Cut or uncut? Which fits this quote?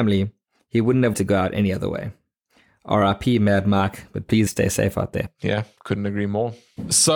cut